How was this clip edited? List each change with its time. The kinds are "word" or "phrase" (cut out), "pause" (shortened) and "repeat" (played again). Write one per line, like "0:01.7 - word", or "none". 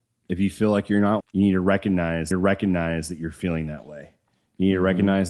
0:01.2 - word
0:02.3 - repeat

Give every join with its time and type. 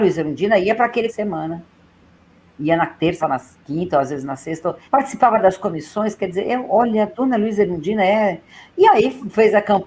0:01.1 - phrase
0:03.2 - word
0:04.8 - pause

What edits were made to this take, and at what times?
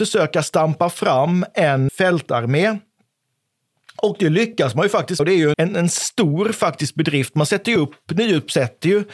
0:01.9 - word
0:05.2 - word
0:05.5 - word

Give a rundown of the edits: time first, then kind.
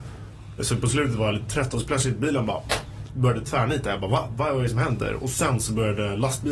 none

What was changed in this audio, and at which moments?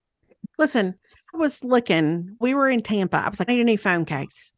0:01.3 - word
0:02.4 - word
0:03.5 - word

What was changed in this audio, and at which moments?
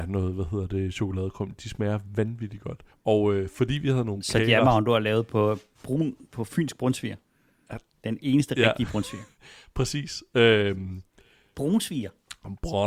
0:02.9 - pause

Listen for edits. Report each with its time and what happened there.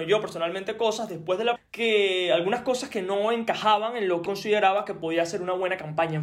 0:01.6 - word
0:04.3 - word

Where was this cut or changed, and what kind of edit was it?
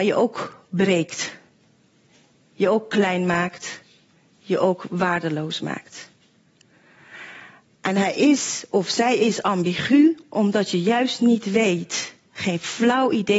none

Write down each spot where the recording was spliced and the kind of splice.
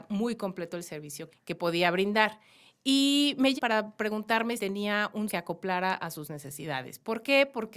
0:01.3 - word
0:03.6 - word
0:04.6 - word
0:05.3 - word

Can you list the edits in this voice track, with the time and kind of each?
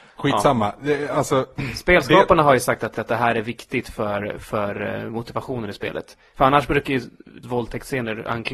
0:02.9 - repeat
0:07.4 - word

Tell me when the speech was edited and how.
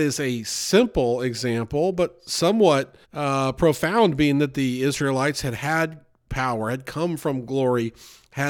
0:03.0 - pause

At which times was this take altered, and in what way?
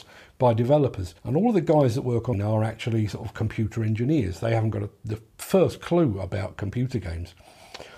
0:01.2 - pause
0:02.3 - phrase

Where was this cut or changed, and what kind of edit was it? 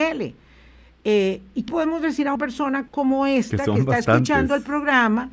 0:01.7 - word
0:02.4 - word
0:02.9 - word

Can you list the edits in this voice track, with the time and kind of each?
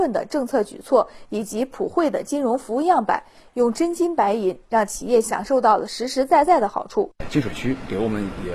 none

